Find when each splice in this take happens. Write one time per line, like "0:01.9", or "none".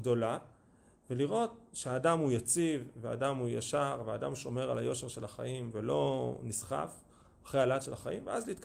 none